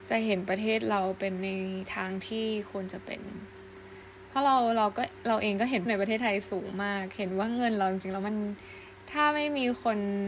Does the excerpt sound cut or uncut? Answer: cut